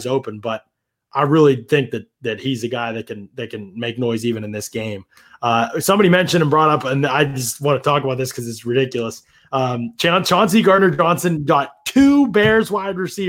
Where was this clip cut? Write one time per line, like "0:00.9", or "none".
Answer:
none

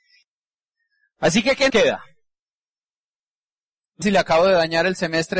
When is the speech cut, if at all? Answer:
0:01.7
0:04.0

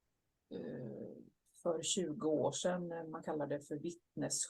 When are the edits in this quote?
none

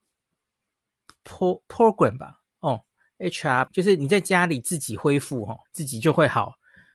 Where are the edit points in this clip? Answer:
0:03.7
0:05.6

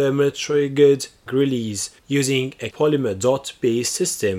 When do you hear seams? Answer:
0:01.3
0:02.0
0:02.7

